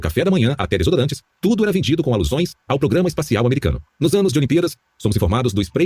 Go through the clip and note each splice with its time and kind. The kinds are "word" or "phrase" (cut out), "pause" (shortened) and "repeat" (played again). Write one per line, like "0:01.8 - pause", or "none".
0:03.9 - pause